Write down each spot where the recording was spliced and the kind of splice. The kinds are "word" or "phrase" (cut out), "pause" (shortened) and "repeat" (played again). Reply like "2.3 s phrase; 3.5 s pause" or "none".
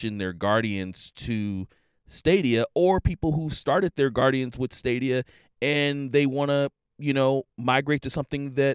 none